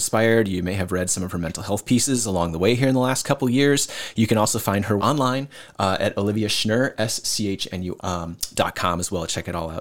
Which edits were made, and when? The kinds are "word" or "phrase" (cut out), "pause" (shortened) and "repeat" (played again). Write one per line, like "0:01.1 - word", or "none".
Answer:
0:05.0 - word
0:08.0 - word